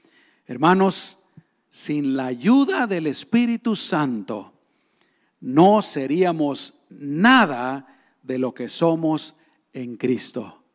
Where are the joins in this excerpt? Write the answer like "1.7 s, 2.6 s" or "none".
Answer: none